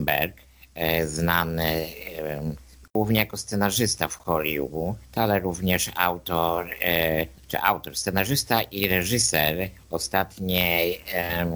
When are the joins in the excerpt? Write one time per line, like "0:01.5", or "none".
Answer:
none